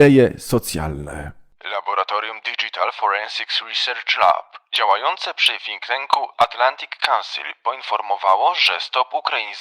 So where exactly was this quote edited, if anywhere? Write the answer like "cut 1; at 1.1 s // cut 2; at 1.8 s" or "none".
none